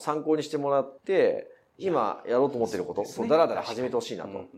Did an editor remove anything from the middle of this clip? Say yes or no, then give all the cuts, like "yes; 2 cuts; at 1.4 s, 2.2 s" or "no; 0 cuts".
yes; 1 cut; at 1.0 s